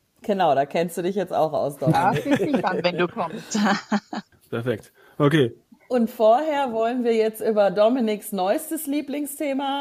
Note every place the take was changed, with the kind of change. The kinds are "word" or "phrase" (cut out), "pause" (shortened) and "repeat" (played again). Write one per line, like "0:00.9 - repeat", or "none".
none